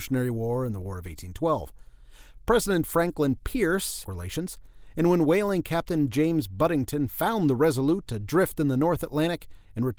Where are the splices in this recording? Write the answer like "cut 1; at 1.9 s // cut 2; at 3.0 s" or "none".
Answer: cut 1; at 4.0 s